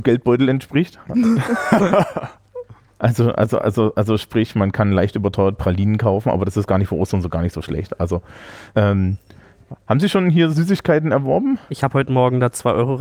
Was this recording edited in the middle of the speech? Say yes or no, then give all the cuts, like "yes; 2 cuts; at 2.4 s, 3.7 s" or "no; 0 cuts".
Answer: yes; 2 cuts; at 8.7 s, 11.6 s